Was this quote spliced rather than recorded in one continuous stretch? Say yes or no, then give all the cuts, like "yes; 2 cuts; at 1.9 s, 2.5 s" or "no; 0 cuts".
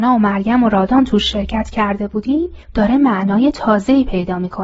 yes; 1 cut; at 2.6 s